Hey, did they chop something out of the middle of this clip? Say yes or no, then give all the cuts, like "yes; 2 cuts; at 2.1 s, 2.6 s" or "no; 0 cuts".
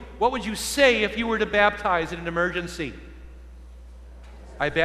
no; 0 cuts